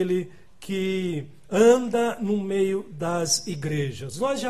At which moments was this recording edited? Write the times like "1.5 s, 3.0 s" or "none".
none

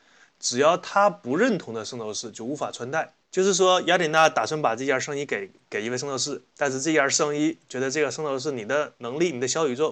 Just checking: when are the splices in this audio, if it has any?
3.2 s

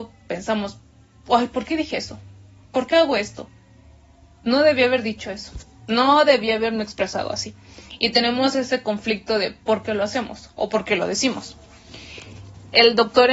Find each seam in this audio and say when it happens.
none

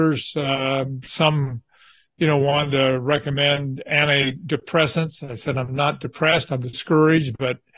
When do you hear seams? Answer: none

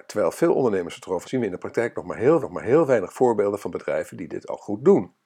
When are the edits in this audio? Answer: 1.2 s, 2.4 s

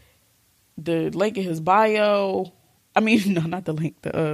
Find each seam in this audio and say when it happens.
2.8 s

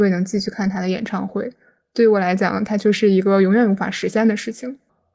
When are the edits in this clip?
none

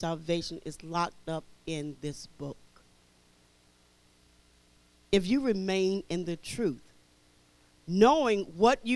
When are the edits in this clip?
none

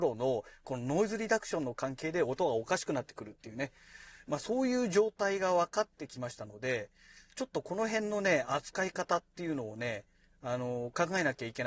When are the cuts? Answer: none

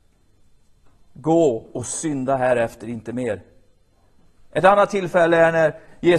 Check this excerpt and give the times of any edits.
none

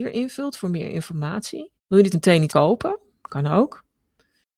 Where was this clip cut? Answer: 1.8 s, 2.1 s, 2.5 s

